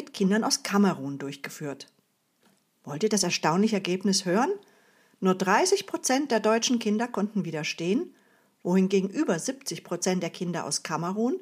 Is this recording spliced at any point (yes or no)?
no